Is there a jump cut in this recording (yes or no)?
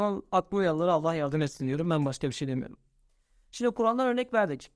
no